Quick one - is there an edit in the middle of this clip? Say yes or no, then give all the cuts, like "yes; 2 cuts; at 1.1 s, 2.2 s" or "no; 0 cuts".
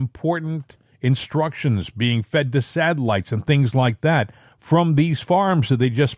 no; 0 cuts